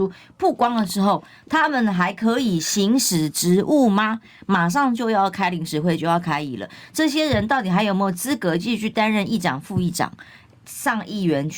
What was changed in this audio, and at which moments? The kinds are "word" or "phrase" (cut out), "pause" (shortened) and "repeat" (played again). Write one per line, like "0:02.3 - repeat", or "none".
none